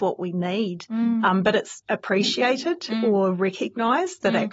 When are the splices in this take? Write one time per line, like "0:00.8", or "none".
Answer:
0:01.8